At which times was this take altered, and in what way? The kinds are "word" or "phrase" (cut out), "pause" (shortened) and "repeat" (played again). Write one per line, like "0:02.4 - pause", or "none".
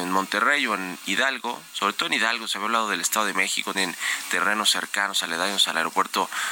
0:03.7 - word

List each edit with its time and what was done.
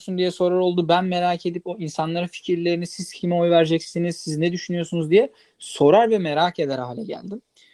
none

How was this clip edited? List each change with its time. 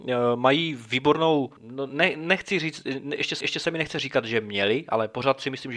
0:01.6 - pause
0:03.4 - repeat

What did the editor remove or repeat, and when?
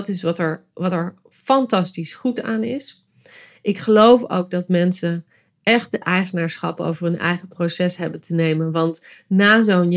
none

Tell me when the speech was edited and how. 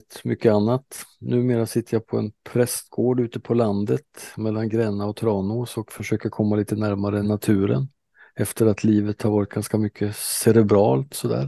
none

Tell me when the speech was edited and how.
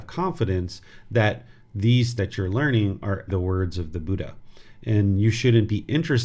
0:02.2 - word
0:03.3 - word

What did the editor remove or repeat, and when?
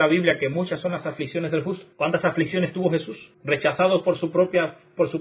0:01.9 - pause
0:03.3 - pause

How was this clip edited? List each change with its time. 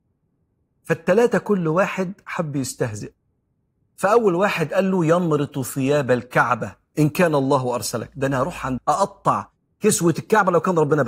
0:08.8 - phrase

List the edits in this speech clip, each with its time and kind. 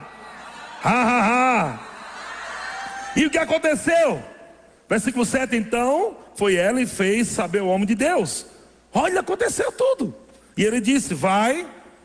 none

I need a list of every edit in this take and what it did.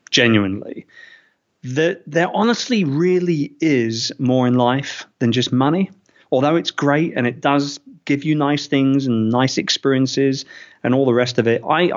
none

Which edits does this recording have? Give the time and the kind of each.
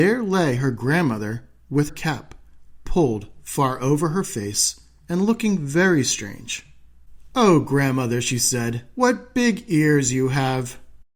0:01.9 - word

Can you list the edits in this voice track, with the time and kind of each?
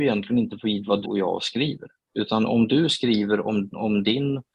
0:01.0 - word

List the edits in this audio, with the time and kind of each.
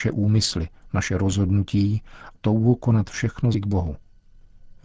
0:02.3 - word
0:03.5 - word

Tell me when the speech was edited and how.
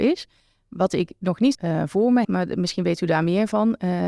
0:01.5 - word
0:02.2 - word

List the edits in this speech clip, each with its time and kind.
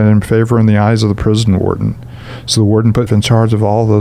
0:03.1 - word

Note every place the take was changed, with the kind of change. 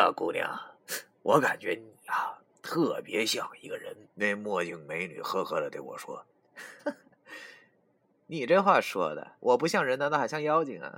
0:04.1 - pause
0:06.3 - pause
0:09.4 - pause

